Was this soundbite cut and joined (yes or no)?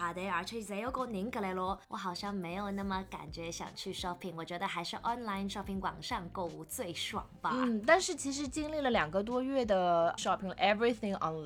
yes